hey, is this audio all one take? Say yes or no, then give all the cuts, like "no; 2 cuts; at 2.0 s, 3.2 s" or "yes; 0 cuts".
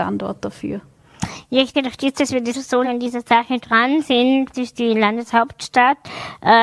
no; 4 cuts; at 1.7 s, 2.5 s, 2.8 s, 4.5 s